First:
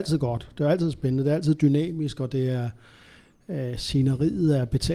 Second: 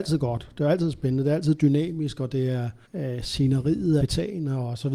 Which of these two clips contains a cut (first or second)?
second